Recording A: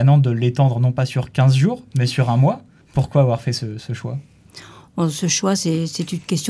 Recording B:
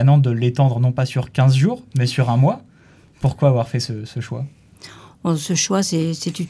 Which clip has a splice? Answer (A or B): A